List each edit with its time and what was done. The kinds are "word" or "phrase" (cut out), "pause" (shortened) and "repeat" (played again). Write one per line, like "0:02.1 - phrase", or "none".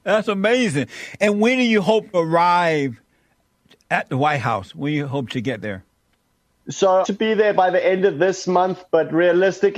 0:02.1 - word
0:07.0 - phrase